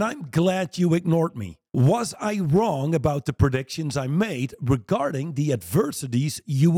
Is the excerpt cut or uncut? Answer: cut